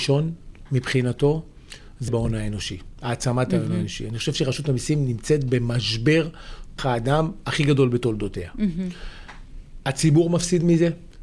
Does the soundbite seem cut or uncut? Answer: cut